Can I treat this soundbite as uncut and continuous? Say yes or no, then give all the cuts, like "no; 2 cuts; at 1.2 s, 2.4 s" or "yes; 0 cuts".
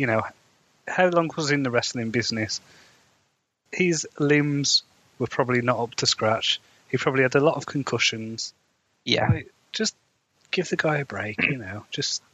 yes; 0 cuts